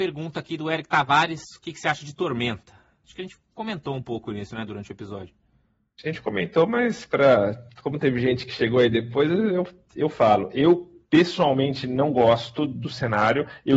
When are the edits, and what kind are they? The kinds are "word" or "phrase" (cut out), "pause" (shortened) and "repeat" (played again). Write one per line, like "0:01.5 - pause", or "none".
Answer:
none